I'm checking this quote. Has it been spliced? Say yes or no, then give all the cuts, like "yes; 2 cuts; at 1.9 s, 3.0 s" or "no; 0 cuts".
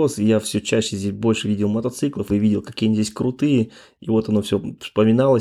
no; 0 cuts